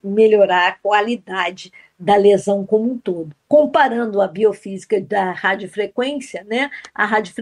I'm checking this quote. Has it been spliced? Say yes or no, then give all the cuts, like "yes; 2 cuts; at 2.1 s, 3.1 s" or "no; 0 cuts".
yes; 1 cut; at 3.4 s